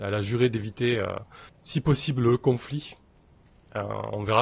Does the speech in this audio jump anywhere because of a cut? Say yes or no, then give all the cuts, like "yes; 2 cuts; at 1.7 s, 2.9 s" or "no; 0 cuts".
yes; 1 cut; at 1.5 s